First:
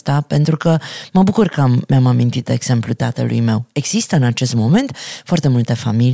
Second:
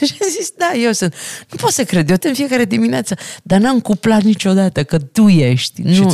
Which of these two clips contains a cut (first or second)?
second